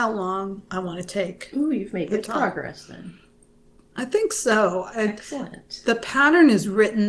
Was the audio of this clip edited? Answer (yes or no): no